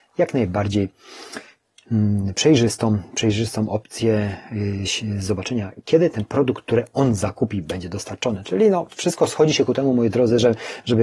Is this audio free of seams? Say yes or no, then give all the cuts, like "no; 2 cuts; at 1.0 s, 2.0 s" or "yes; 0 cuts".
yes; 0 cuts